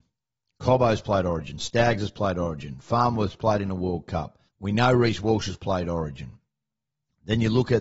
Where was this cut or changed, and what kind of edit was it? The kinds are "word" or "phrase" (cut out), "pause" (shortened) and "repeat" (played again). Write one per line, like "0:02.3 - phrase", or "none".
0:04.5 - pause